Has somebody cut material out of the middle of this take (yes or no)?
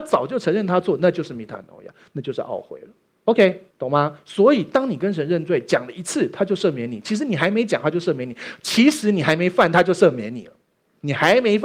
yes